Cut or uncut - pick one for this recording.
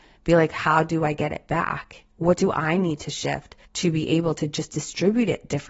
cut